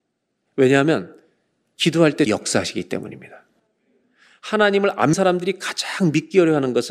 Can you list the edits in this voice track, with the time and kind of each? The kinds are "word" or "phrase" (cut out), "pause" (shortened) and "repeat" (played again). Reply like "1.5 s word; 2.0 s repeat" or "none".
2.3 s word; 5.1 s word